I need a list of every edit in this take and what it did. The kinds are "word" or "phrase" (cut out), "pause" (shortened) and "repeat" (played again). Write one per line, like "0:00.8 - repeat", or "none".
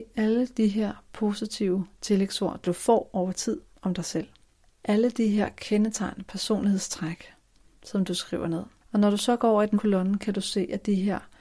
0:02.6 - phrase
0:08.8 - pause
0:09.7 - word